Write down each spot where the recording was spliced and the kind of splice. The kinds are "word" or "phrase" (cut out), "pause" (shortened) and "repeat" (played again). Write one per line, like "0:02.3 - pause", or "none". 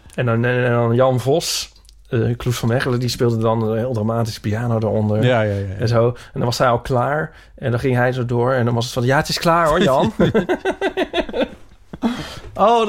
none